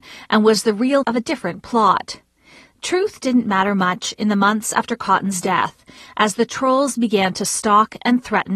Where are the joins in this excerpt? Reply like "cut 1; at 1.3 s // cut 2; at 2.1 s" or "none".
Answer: cut 1; at 1.0 s